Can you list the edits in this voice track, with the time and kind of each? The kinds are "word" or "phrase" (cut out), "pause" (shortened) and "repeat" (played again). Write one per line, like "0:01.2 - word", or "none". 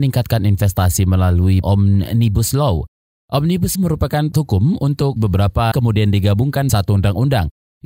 0:01.6 - word
0:03.7 - word
0:04.3 - word
0:05.2 - word
0:05.7 - word
0:06.7 - word